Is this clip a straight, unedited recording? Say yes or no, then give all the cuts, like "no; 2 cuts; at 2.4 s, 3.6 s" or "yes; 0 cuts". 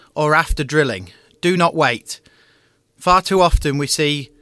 yes; 0 cuts